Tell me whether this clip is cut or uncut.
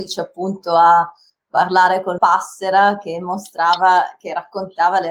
cut